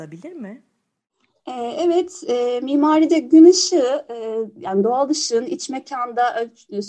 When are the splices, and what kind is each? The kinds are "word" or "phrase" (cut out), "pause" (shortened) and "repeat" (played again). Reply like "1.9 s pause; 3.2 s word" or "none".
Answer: none